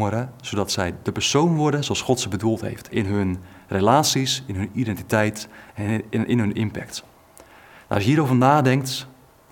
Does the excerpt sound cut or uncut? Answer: uncut